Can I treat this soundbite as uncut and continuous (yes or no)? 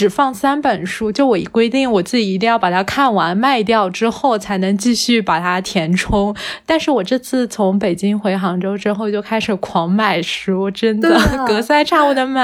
yes